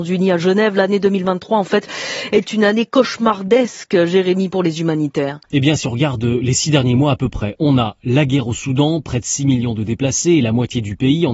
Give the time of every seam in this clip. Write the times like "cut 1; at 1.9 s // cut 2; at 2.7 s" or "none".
cut 1; at 5.4 s